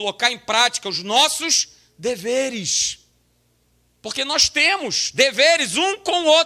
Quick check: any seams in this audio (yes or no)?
no